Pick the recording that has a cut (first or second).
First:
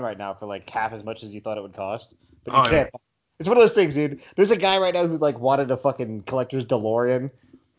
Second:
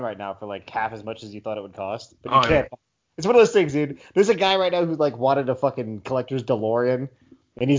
second